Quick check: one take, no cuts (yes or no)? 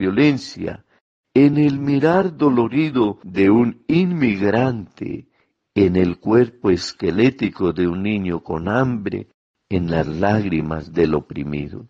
yes